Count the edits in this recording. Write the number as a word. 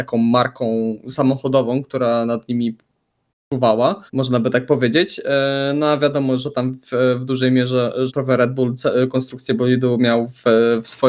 two